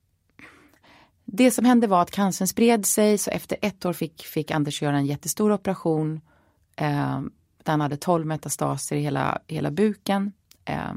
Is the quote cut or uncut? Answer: uncut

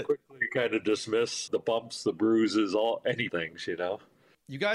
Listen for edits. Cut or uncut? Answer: cut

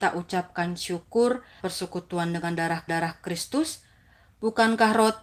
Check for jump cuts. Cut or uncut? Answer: cut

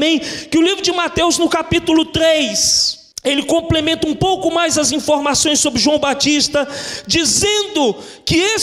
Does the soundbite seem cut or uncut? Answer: cut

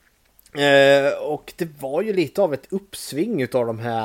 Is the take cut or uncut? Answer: uncut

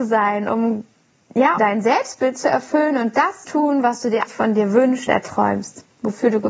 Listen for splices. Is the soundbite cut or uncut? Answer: cut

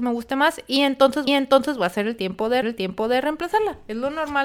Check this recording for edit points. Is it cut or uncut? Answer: cut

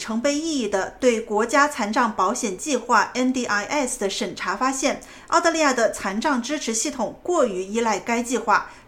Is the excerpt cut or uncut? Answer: uncut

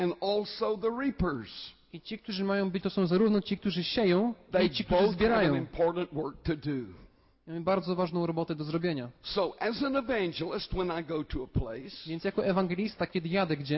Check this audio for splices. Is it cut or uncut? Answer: cut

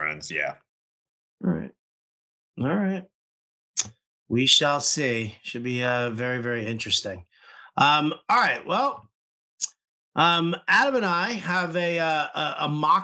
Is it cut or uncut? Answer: uncut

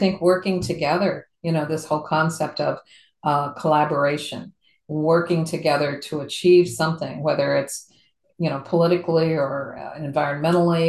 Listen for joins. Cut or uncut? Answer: uncut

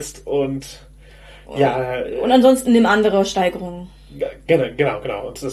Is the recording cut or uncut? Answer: uncut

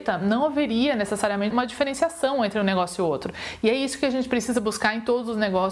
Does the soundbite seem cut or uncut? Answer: cut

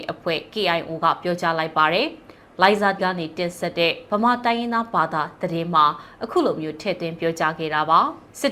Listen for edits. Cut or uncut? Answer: cut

